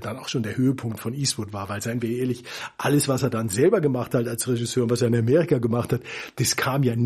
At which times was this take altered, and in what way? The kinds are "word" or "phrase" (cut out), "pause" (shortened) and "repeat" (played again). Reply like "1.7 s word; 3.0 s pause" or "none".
none